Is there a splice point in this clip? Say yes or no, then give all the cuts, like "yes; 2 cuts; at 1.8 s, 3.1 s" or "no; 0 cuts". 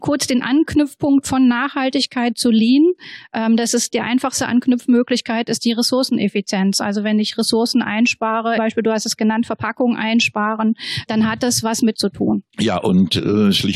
yes; 4 cuts; at 8.6 s, 11.1 s, 11.9 s, 12.5 s